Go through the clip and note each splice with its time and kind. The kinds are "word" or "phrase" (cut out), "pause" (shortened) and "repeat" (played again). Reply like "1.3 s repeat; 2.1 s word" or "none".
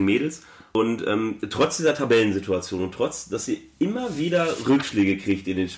none